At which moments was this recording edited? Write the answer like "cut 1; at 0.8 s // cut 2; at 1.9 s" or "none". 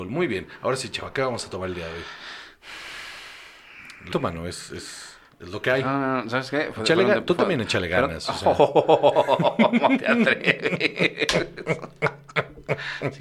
cut 1; at 4.1 s